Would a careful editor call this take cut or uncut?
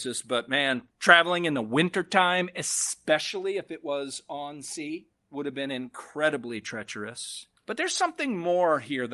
cut